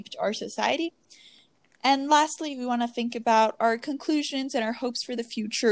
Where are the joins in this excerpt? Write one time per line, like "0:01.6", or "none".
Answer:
none